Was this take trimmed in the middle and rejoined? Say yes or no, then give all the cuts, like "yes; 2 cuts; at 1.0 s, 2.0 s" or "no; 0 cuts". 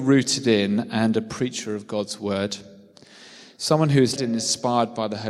yes; 1 cut; at 4.2 s